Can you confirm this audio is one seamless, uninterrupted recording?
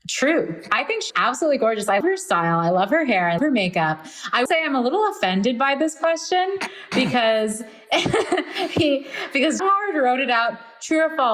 no; 5 cuts; at 1.1 s, 2.0 s, 3.4 s, 4.5 s, 9.6 s

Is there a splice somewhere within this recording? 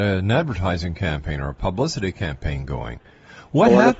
no; 0 cuts

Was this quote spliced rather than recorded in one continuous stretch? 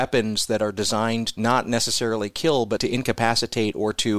yes; 2 cuts; at 1.4 s, 2.8 s

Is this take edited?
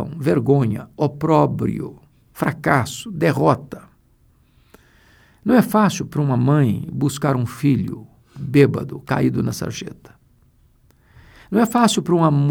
no; 0 cuts

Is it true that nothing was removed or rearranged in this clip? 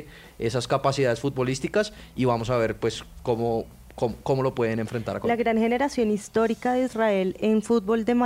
yes; 0 cuts

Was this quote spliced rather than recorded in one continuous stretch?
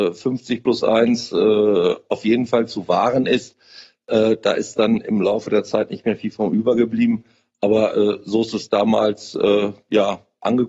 no; 0 cuts

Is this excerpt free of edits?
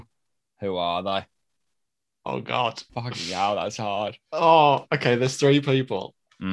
no; 1 cut; at 2.9 s

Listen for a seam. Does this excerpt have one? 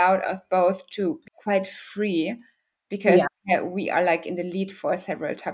yes; 1 cut; at 1.3 s

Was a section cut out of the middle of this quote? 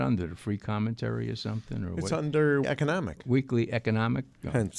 yes; 1 cut; at 2.6 s

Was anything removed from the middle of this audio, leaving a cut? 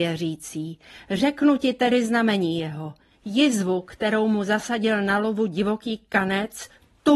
no; 0 cuts

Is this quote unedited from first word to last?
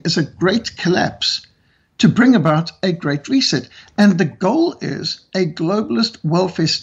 yes; 0 cuts

